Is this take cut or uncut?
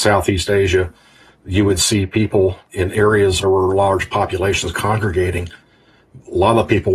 cut